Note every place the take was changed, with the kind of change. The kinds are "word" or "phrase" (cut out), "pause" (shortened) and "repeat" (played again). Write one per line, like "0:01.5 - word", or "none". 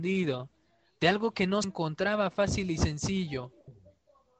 0:01.6 - word